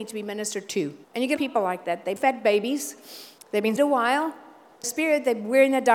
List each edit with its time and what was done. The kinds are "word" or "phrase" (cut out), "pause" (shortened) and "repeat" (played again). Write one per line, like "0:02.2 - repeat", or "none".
0:01.0 - pause
0:01.4 - phrase
0:02.2 - word
0:03.4 - pause
0:03.8 - word
0:04.8 - phrase